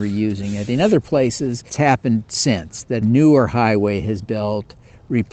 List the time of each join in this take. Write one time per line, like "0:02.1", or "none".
0:01.7
0:03.0
0:04.2